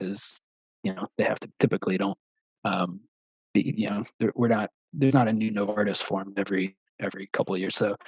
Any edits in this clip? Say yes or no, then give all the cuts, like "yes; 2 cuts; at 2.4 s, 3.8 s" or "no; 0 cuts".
yes; 1 cut; at 1.5 s